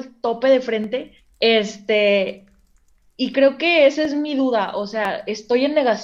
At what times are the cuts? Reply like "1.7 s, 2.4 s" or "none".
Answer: 1.2 s, 3.3 s